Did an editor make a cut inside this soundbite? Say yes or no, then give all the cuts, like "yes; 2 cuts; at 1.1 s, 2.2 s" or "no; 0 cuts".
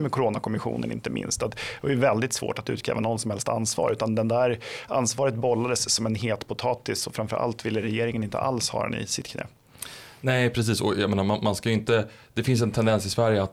no; 0 cuts